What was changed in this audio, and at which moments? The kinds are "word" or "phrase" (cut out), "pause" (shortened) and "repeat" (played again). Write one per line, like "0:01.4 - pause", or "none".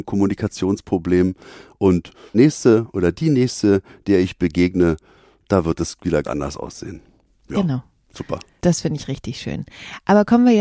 0:02.3 - word
0:06.2 - word